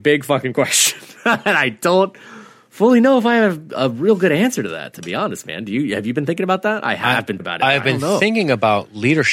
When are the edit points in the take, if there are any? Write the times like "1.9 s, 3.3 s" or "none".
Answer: 7.4 s